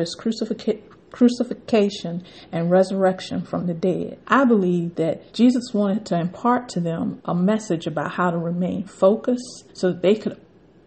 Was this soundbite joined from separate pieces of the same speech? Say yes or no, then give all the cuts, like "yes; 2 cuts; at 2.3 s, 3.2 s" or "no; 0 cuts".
yes; 3 cuts; at 4.2 s, 5.3 s, 9.7 s